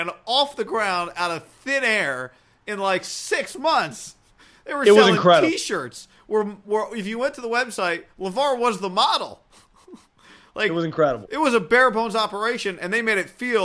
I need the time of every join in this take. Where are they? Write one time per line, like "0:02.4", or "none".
none